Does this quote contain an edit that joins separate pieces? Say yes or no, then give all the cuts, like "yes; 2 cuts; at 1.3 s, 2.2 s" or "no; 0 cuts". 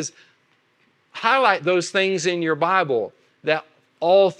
no; 0 cuts